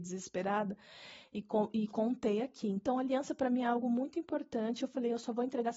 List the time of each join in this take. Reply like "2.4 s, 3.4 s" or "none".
none

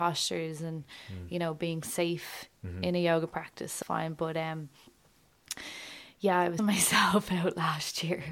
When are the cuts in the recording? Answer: 3.8 s, 6.6 s

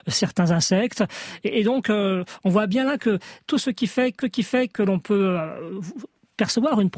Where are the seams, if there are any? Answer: 4.2 s

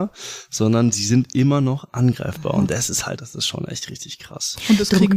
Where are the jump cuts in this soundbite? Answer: 3.2 s

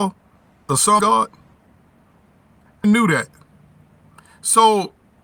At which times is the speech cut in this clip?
1.0 s, 2.8 s

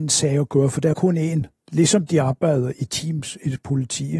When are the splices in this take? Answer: 0.9 s, 1.6 s

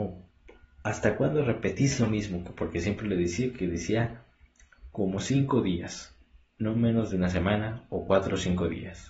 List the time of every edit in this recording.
none

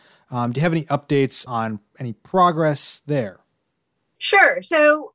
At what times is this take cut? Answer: 1.5 s

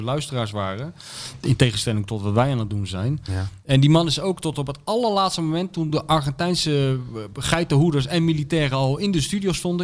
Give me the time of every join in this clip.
none

